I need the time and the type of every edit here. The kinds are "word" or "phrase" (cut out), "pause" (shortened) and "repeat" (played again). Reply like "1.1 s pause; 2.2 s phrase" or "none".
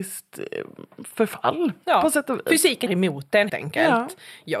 2.9 s word; 3.5 s word